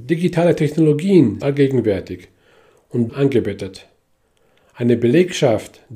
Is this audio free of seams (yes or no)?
no